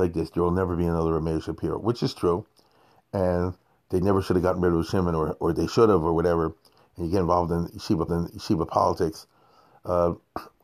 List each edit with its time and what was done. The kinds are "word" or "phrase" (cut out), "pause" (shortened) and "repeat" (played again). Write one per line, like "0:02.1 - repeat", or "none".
0:08.1 - repeat